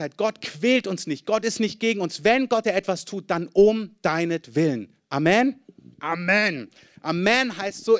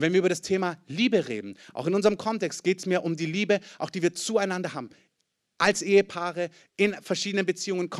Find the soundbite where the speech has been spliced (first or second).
first